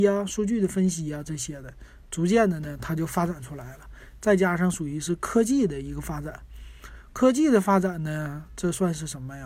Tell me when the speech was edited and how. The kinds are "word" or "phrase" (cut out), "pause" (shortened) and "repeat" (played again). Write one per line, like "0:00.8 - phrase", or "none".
none